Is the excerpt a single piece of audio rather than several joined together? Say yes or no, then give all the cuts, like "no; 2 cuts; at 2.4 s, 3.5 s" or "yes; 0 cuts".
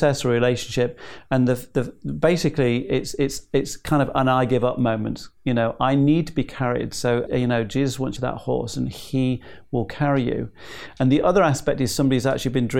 no; 3 cuts; at 5.4 s, 7.3 s, 8.2 s